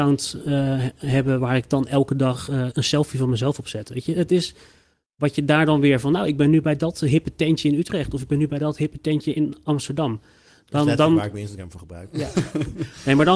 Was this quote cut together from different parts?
no; 0 cuts

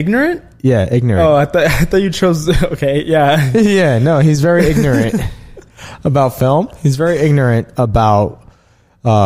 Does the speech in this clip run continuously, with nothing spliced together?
yes; 0 cuts

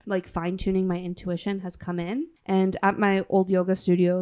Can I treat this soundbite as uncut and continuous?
no; 1 cut; at 2.4 s

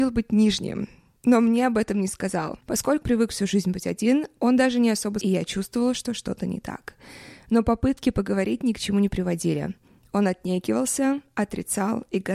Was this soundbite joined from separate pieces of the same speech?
yes; 2 cuts; at 3.0 s, 5.2 s

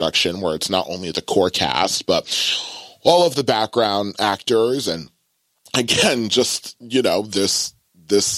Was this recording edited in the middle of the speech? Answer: no; 0 cuts

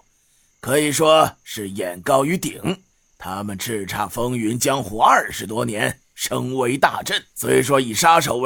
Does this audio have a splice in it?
yes; 2 cuts; at 2.9 s, 7.3 s

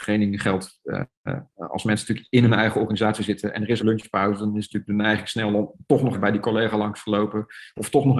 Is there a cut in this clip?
yes; 3 cuts; at 1.1 s, 3.8 s, 6.1 s

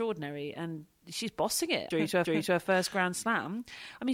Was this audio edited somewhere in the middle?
yes; 2 cuts; at 1.9 s, 2.3 s

